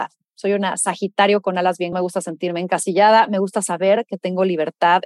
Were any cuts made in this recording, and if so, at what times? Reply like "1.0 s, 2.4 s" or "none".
1.9 s